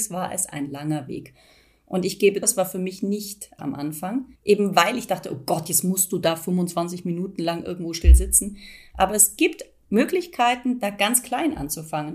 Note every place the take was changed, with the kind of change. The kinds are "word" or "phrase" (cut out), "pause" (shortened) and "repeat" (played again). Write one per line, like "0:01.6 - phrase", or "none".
0:02.4 - word
0:03.6 - word
0:04.4 - pause

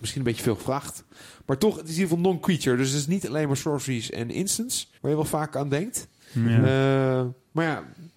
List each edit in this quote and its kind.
0:05.0 - pause

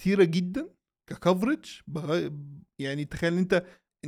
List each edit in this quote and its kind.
none

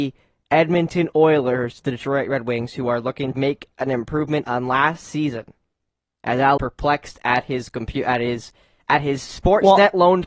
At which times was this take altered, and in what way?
0:03.3 - word
0:06.6 - word

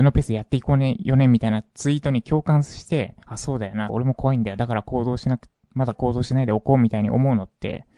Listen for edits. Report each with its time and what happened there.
0:03.2 - pause
0:03.9 - phrase

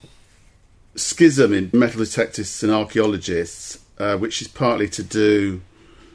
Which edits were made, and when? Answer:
0:01.7 - word

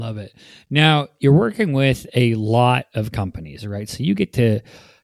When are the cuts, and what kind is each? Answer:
none

